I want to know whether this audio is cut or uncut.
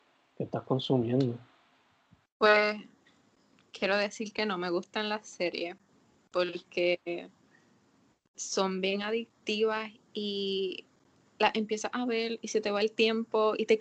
uncut